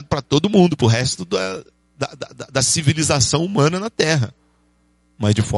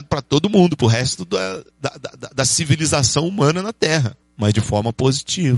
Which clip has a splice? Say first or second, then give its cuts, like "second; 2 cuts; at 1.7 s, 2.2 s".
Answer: second; 2 cuts; at 1.7 s, 4.2 s